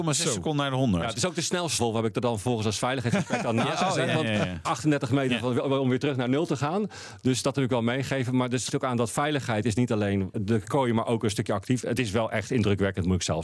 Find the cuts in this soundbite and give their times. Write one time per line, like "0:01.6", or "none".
0:01.8
0:04.6
0:08.7
0:10.3